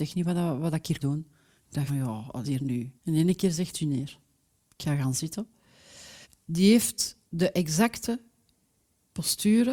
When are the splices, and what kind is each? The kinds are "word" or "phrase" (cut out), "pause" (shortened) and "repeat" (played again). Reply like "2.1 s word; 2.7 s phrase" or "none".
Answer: 1.0 s word; 1.9 s word; 2.4 s phrase; 3.0 s pause; 3.7 s phrase; 4.5 s pause; 6.2 s pause; 7.3 s pause